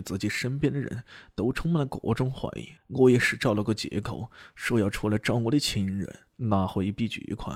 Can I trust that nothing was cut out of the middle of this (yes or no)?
no